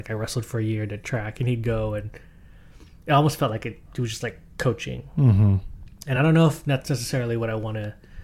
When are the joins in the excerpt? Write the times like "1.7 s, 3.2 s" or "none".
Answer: none